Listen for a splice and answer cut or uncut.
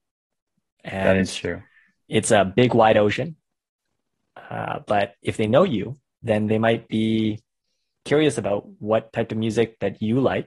uncut